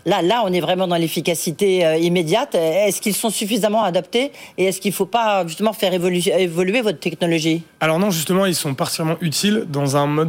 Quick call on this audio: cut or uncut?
uncut